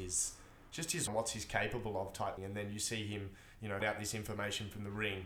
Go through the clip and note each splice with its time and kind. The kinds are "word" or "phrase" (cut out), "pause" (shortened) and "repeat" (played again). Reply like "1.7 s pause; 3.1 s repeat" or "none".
1.1 s word; 2.4 s word; 3.8 s word